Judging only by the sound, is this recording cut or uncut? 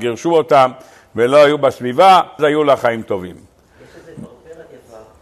cut